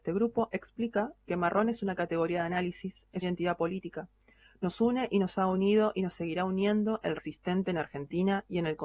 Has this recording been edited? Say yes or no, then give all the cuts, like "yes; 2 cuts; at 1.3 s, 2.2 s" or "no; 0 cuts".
yes; 2 cuts; at 3.2 s, 7.2 s